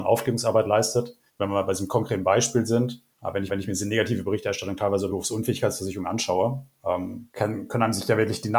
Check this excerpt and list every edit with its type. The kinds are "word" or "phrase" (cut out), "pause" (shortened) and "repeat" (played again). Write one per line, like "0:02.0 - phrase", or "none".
0:01.3 - pause
0:03.1 - pause
0:03.5 - repeat
0:05.1 - word
0:07.3 - pause